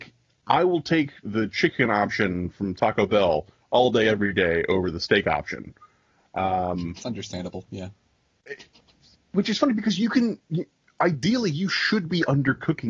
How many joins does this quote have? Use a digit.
1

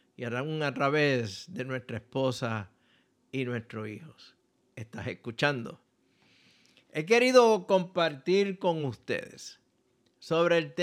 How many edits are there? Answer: 0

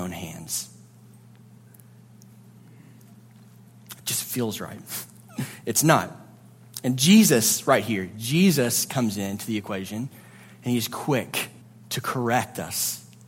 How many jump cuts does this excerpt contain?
1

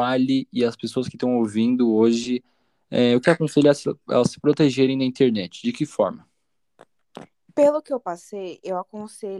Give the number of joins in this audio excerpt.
2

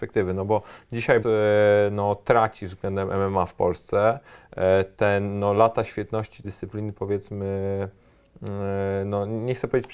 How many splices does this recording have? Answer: 2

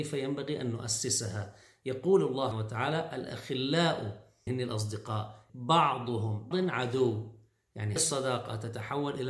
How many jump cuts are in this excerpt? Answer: 5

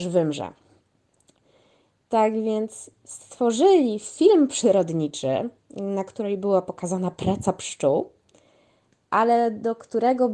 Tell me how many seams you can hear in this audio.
1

